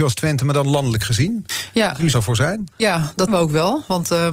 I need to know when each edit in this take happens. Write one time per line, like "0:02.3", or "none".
0:02.1
0:02.7
0:03.3